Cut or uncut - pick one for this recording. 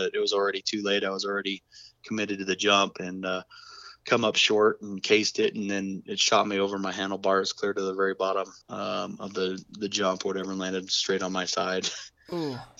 cut